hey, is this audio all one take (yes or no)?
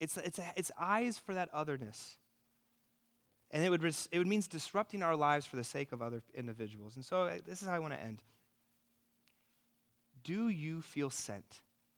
yes